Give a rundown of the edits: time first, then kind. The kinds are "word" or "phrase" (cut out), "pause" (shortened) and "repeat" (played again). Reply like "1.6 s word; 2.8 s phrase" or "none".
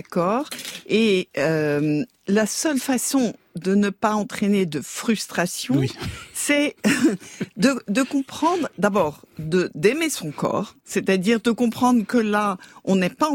10.8 s pause